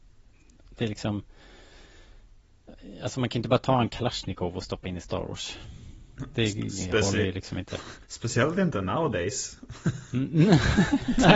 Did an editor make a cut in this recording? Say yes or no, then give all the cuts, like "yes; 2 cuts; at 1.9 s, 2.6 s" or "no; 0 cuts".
yes; 1 cut; at 8.0 s